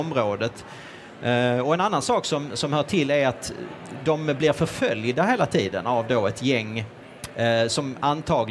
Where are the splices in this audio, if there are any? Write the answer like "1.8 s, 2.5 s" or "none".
none